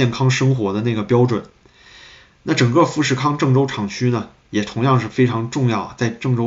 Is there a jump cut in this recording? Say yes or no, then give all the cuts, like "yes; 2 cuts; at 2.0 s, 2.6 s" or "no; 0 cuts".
no; 0 cuts